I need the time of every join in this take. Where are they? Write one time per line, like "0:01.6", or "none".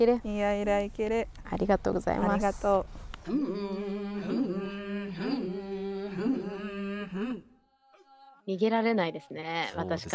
none